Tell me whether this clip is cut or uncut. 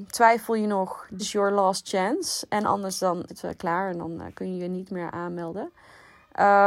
cut